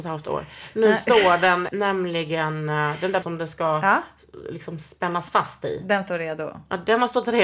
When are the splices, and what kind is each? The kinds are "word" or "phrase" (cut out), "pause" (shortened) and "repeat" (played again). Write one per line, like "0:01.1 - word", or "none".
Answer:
0:01.7 - word
0:03.2 - word